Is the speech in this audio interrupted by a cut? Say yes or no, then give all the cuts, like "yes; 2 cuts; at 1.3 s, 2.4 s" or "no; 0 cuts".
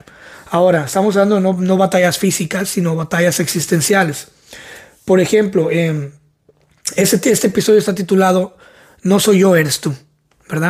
no; 0 cuts